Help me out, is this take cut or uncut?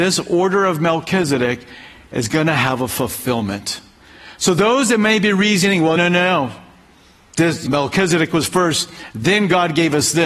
cut